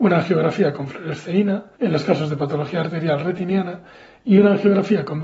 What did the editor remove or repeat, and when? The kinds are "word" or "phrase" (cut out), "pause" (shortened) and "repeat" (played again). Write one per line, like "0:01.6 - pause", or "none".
0:01.7 - pause